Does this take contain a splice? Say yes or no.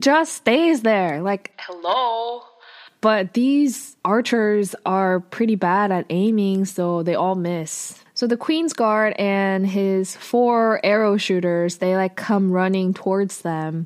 yes